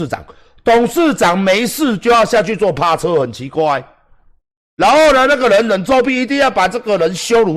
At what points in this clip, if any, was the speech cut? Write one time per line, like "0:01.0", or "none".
none

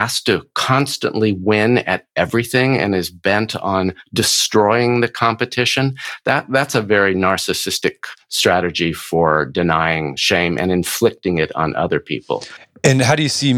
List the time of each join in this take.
none

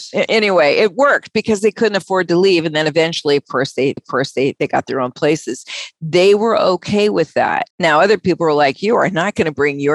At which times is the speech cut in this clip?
0:04.0
0:07.7

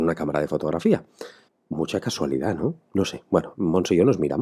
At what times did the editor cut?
0:01.5

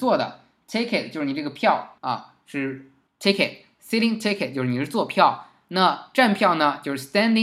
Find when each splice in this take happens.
0:02.0
0:03.1

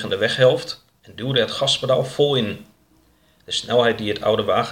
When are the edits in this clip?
none

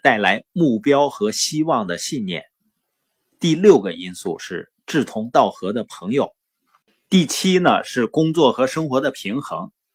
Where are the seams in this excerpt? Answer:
none

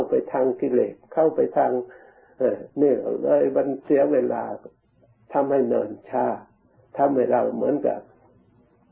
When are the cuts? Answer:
0:02.7

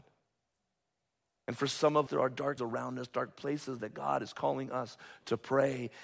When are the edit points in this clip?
0:02.1
0:02.6

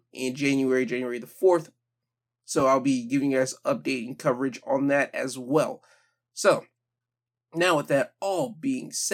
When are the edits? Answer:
none

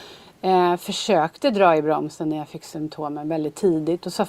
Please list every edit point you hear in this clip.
none

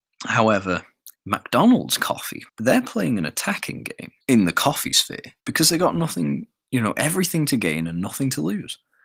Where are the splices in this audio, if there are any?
0:01.1
0:02.5
0:04.2
0:05.4

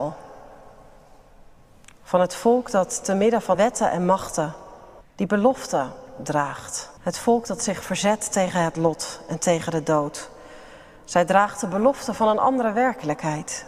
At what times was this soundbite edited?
0:03.5
0:05.0
0:07.0

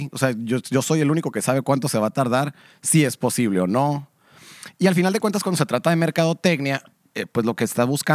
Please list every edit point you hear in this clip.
none

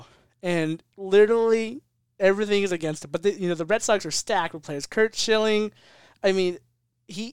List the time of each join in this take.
none

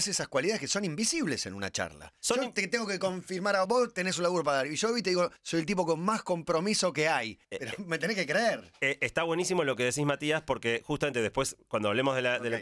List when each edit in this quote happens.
0:02.2
0:03.6
0:05.4
0:07.4

